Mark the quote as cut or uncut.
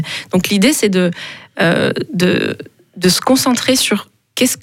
uncut